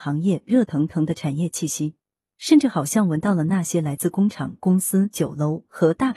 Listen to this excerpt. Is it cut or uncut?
uncut